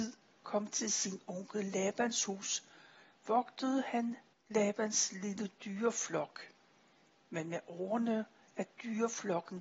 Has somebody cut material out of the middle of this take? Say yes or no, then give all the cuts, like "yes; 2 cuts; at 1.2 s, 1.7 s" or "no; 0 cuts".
no; 0 cuts